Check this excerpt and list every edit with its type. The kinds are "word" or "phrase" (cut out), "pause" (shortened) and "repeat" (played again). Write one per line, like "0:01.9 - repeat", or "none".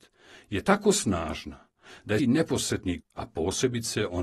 0:02.2 - word
0:03.0 - word